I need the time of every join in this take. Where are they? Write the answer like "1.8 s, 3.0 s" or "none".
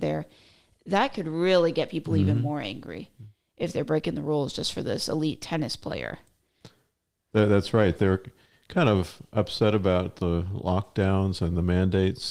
none